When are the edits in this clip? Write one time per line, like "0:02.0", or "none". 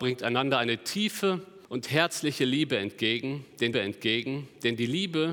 0:01.6
0:03.7